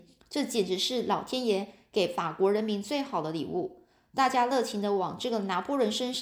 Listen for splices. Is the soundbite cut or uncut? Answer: uncut